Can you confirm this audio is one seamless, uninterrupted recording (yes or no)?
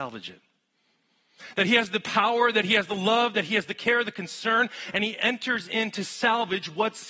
yes